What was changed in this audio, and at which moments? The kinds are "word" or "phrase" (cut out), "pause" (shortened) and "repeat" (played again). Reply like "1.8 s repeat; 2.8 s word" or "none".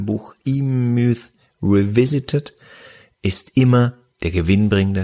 none